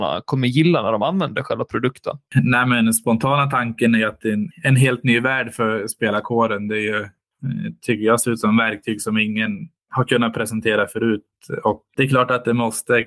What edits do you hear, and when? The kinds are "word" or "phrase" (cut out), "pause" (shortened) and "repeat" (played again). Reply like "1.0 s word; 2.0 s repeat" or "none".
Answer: 4.5 s word; 11.9 s word